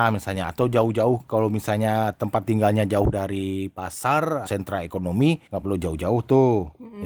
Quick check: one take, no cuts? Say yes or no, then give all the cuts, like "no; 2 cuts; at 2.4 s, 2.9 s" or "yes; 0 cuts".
no; 2 cuts; at 4.5 s, 5.5 s